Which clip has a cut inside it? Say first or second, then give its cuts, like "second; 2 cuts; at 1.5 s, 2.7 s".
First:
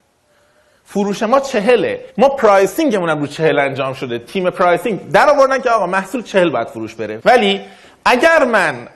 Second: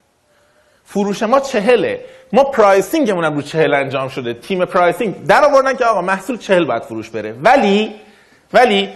first; 2 cuts; at 2.1 s, 7.2 s